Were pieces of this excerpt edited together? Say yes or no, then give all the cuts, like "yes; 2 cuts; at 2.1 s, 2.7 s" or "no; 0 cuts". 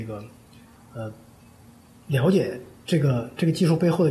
no; 0 cuts